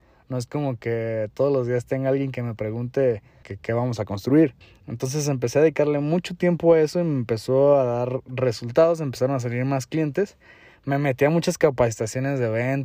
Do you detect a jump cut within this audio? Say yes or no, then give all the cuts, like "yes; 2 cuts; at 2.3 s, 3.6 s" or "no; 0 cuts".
yes; 2 cuts; at 3.4 s, 4.6 s